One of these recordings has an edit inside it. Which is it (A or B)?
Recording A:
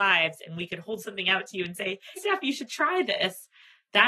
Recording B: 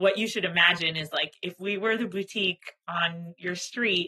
A